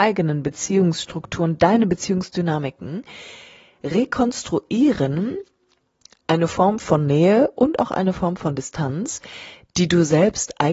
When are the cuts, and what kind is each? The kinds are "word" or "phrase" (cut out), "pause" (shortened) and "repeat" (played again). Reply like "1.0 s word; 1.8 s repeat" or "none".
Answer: none